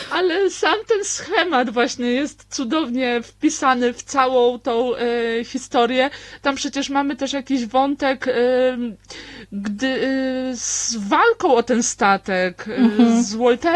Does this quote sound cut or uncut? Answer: uncut